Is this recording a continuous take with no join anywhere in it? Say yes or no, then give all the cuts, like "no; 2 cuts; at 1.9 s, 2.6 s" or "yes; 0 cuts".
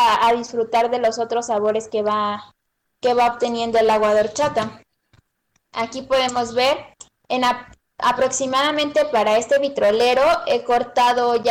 yes; 0 cuts